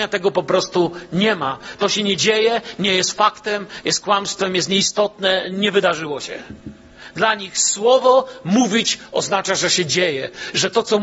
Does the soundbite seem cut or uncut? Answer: uncut